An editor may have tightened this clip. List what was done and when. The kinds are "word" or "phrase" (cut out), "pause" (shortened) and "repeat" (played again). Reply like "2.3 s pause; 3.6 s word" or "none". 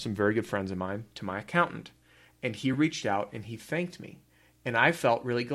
none